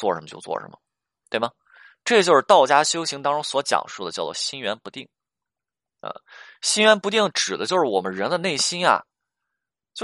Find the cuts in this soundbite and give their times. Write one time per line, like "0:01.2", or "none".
none

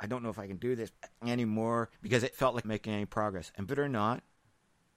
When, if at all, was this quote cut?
0:01.0
0:01.9
0:02.3
0:02.6
0:03.7

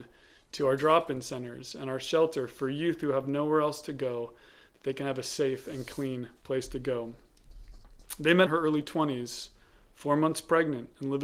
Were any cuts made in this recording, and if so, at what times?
0:08.5

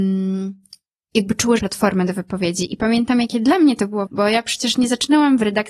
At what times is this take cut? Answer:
0:01.6
0:04.1

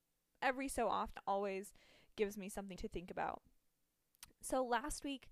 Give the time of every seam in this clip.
0:01.2
0:02.8

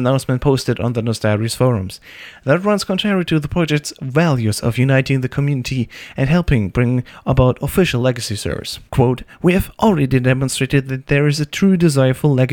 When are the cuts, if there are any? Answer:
0:08.9

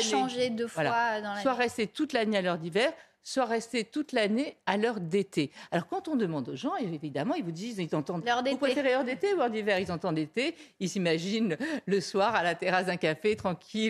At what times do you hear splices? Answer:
none

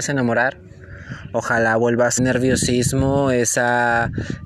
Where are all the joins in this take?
0:02.2

